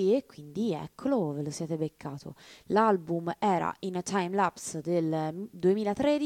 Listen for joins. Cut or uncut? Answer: uncut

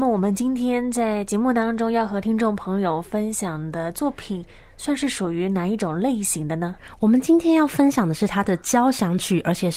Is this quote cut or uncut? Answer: uncut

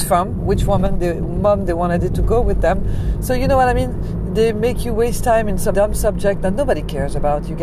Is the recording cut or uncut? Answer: cut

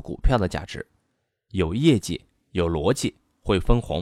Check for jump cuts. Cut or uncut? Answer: uncut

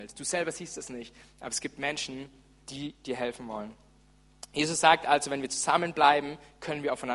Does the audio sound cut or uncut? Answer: uncut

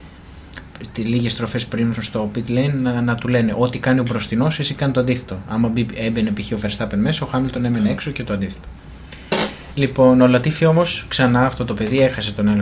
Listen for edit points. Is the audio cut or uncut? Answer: cut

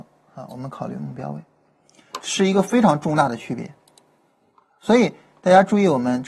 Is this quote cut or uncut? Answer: uncut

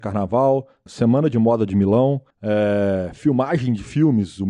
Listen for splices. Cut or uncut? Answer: cut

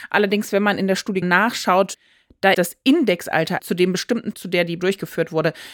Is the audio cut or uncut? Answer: cut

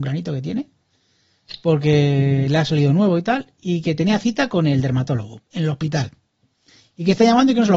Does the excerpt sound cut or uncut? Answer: uncut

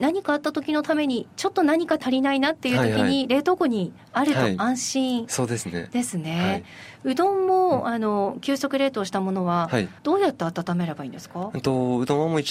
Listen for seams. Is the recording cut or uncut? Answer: cut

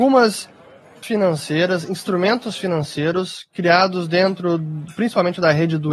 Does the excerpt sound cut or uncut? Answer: cut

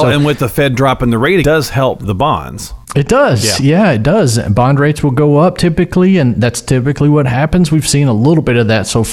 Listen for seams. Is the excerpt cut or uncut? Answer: cut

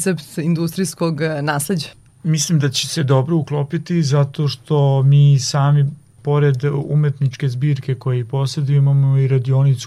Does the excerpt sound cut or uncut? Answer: uncut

